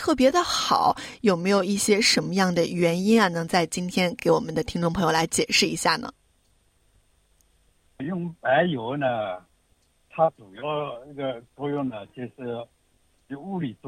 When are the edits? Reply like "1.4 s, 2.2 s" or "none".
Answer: 8.0 s